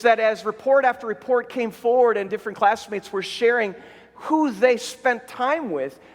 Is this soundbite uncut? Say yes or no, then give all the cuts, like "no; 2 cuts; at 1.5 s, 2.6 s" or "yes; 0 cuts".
yes; 0 cuts